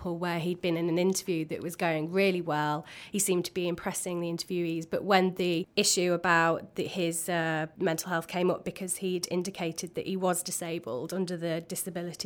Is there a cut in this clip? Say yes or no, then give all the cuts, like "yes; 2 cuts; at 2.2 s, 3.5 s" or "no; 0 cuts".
no; 0 cuts